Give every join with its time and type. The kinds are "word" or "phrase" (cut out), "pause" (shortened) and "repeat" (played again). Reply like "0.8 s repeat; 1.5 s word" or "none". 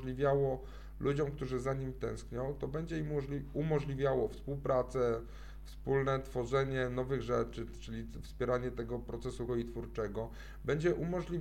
9.5 s word